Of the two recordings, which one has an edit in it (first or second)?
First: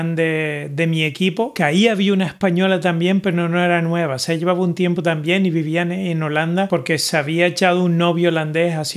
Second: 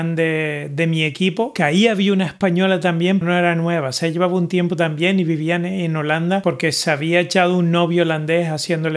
second